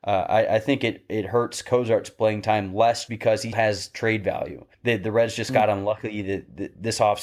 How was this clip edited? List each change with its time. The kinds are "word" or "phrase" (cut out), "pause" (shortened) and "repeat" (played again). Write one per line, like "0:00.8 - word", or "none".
0:03.1 - word
0:03.5 - word
0:04.7 - pause